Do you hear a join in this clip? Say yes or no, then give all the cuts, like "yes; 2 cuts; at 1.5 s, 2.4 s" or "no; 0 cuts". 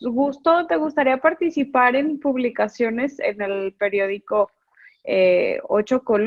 no; 0 cuts